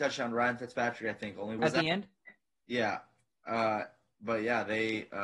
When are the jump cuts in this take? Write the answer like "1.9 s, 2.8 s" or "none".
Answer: 1.6 s